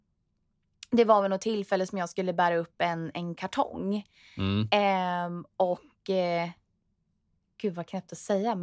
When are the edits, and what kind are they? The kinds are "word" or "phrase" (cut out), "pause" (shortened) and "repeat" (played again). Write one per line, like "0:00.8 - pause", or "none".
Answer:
none